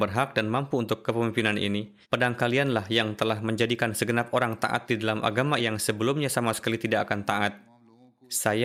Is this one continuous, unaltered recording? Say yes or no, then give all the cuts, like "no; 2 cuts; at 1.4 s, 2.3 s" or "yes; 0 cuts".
no; 2 cuts; at 2.0 s, 5.6 s